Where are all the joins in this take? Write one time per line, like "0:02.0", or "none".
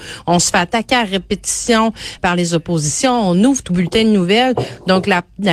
0:02.2
0:03.7

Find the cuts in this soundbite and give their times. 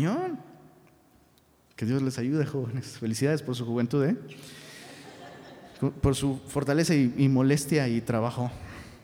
none

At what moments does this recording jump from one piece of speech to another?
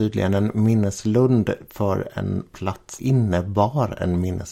0:03.0

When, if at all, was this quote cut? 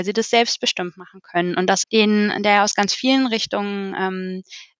0:01.8

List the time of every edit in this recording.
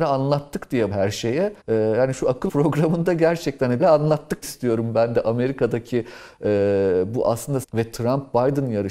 0:00.9
0:01.6
0:02.5
0:03.8
0:04.4
0:07.6

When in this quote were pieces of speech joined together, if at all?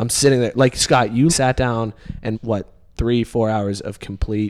0:01.3
0:02.3

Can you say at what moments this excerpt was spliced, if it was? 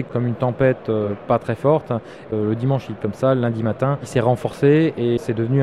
0:03.0

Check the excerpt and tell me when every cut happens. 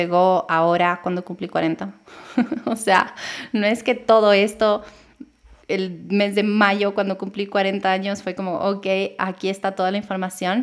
0:05.6

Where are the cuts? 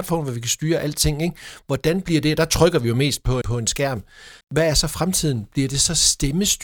0:03.4
0:04.4

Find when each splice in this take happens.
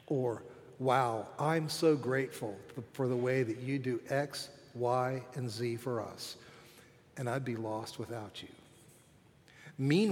none

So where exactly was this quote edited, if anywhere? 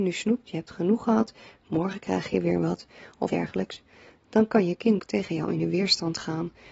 0:03.3
0:05.0

